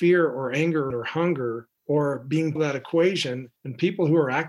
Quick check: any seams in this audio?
yes; 4 cuts; at 0.9 s, 1.8 s, 2.6 s, 3.6 s

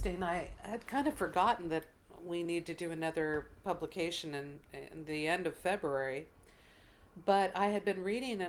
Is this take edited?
no; 0 cuts

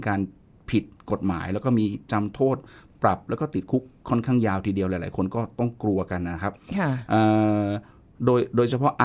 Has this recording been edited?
no; 0 cuts

